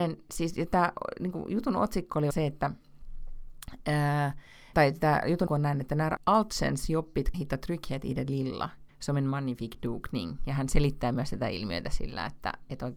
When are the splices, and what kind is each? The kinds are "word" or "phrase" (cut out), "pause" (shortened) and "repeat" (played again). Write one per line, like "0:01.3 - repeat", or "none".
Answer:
0:02.3 - word
0:04.7 - word
0:05.5 - word
0:06.2 - word
0:07.3 - phrase
0:08.9 - pause